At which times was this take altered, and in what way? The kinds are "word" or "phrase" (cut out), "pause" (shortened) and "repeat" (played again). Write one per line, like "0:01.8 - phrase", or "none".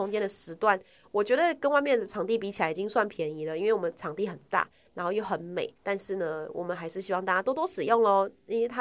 0:05.8 - pause